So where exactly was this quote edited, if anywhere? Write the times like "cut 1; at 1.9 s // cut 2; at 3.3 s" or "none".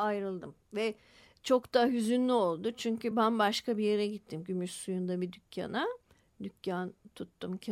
none

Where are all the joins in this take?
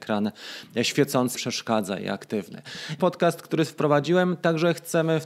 cut 1; at 1.3 s // cut 2; at 3.0 s

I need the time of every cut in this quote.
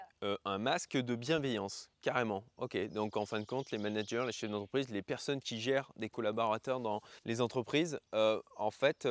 cut 1; at 7.2 s

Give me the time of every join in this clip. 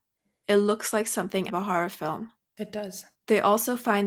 cut 1; at 1.5 s // cut 2; at 3.1 s

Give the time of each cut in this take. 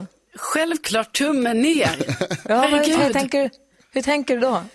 none

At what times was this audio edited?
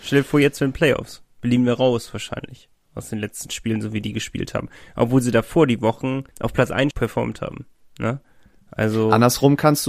cut 1; at 6.3 s // cut 2; at 6.9 s

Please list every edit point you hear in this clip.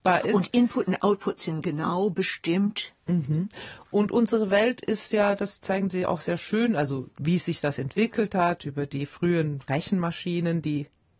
cut 1; at 7.1 s

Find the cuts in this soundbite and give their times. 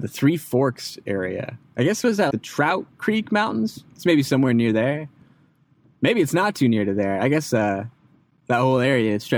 cut 1; at 2.3 s

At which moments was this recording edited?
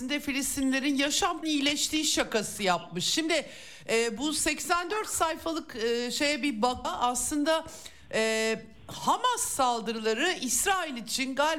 cut 1; at 1.4 s // cut 2; at 6.8 s

